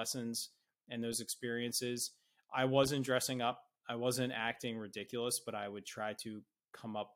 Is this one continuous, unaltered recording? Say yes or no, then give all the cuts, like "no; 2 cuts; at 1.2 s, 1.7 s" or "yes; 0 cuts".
yes; 0 cuts